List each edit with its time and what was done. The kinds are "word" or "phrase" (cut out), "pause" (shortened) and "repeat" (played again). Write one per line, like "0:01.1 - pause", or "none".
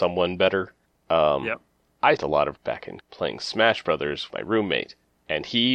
0:02.2 - word
0:02.6 - word
0:03.0 - word
0:04.3 - word